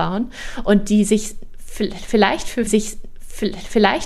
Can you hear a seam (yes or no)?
yes